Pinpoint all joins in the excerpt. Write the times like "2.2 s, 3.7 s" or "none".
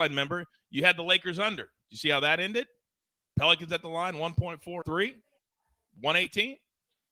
4.8 s